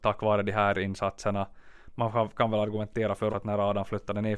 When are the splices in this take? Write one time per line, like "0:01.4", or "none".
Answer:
0:03.3